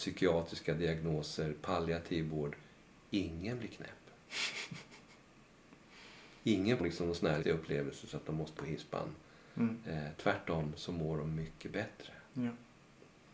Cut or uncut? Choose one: cut